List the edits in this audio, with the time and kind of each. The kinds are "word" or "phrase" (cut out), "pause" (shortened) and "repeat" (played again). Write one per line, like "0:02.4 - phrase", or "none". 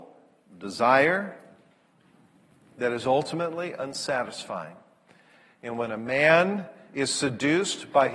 none